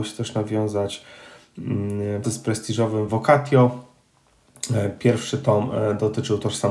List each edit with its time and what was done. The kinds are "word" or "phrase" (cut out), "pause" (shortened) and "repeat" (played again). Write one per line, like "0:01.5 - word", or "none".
0:02.2 - word
0:03.1 - word